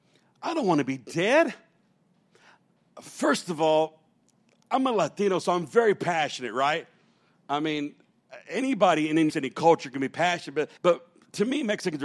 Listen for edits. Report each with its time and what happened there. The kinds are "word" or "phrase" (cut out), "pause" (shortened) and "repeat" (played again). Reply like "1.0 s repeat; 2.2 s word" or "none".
9.3 s word; 10.8 s pause